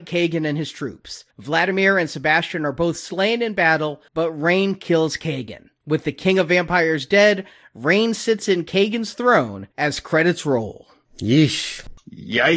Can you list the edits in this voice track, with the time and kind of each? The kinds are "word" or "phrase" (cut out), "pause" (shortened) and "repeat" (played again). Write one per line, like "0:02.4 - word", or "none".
0:01.3 - pause
0:04.1 - pause
0:09.7 - pause

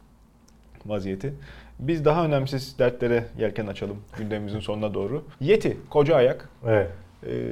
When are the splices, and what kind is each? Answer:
0:05.3 - pause

